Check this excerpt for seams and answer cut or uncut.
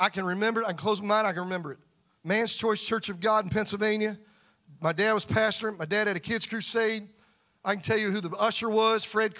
uncut